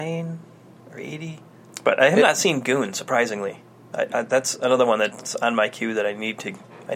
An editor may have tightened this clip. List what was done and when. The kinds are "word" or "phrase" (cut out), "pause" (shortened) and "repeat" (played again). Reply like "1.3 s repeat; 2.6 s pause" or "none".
none